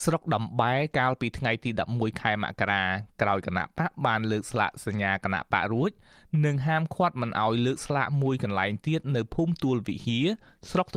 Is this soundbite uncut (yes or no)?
yes